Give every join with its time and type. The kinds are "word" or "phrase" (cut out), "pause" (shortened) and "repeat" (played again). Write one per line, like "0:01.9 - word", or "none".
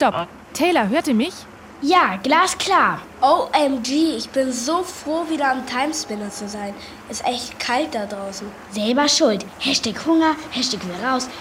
none